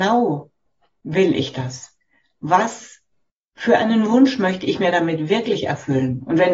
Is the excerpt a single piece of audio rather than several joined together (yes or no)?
yes